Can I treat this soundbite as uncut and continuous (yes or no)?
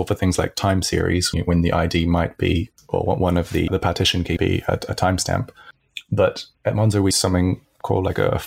no